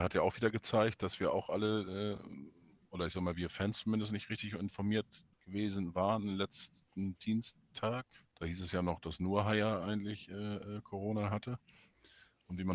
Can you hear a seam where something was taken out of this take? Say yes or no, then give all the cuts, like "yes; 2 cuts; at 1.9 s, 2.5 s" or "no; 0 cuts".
yes; 2 cuts; at 5.3 s, 8.2 s